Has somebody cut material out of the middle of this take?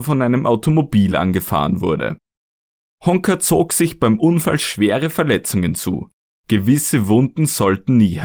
no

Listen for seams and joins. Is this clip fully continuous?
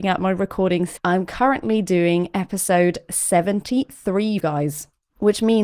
no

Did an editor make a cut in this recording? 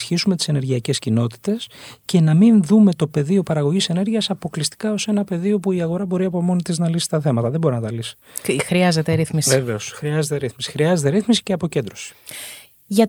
no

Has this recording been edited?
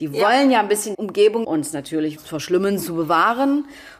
yes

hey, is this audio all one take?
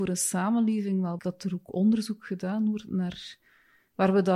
no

